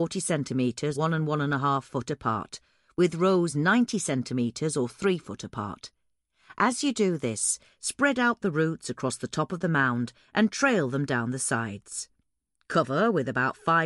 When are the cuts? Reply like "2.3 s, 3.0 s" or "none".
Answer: 0.9 s